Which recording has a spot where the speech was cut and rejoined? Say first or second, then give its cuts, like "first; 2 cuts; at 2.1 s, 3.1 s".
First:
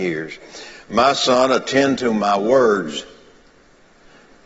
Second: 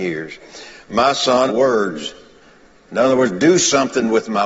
second; 2 cuts; at 1.5 s, 2.4 s